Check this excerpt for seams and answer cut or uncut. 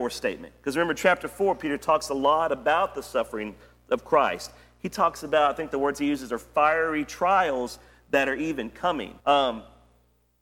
cut